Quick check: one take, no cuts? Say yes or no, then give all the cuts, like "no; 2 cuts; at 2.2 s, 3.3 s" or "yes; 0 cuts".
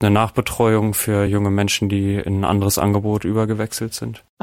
yes; 0 cuts